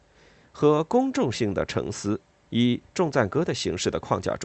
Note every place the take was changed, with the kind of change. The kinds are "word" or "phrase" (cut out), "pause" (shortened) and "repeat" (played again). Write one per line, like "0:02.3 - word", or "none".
none